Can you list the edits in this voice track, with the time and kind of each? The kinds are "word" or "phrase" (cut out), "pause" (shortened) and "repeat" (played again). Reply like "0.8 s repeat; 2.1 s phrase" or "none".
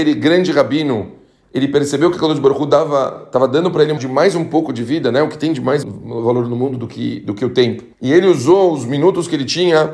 4.0 s word; 5.8 s word; 7.9 s pause